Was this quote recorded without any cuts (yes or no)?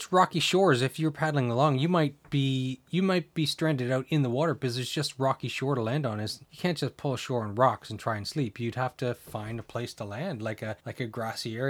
no